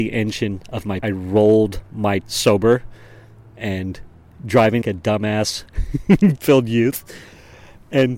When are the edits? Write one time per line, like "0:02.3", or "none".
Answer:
0:01.0
0:02.2
0:04.8
0:06.4